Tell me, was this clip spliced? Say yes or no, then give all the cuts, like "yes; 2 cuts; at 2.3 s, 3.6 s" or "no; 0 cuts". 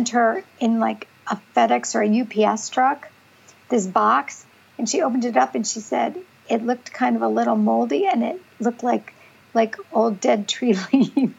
no; 0 cuts